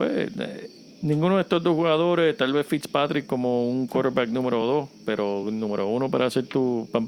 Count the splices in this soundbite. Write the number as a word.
zero